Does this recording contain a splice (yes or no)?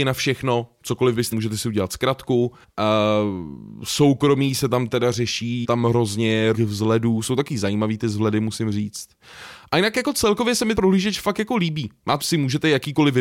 yes